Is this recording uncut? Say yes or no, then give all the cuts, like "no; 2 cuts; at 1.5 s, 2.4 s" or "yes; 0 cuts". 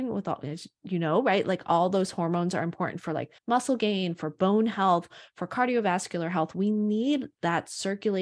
no; 1 cut; at 3.4 s